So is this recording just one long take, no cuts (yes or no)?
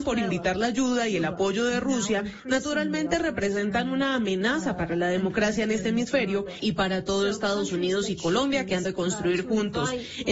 no